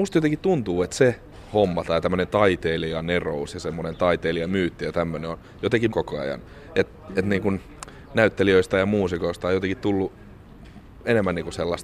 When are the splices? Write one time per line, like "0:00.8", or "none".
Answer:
0:05.9